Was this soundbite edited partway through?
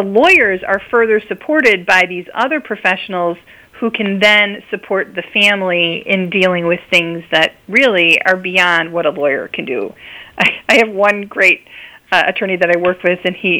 no; 0 cuts

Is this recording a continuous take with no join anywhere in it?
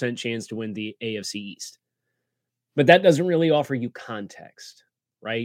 yes; 0 cuts

